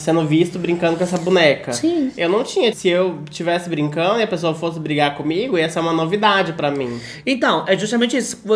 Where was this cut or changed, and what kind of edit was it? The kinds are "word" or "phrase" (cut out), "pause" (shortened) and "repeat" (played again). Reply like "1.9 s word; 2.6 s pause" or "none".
2.7 s word